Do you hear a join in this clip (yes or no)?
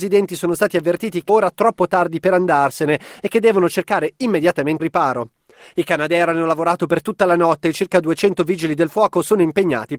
yes